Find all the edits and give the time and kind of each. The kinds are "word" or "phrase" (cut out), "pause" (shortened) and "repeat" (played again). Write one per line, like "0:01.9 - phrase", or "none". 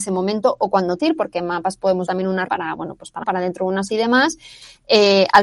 0:01.0 - word
0:02.1 - word
0:02.5 - word
0:03.2 - word
0:03.9 - word